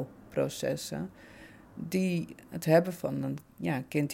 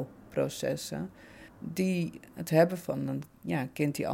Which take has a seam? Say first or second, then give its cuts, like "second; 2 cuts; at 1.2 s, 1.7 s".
second; 1 cut; at 1.5 s